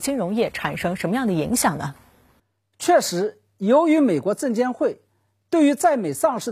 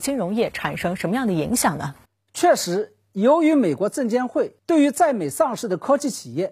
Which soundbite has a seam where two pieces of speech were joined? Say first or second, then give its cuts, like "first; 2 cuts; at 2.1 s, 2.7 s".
second; 2 cuts; at 2.0 s, 4.6 s